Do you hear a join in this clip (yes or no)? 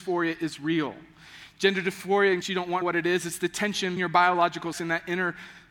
yes